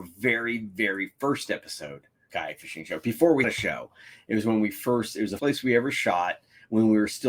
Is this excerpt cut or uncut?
cut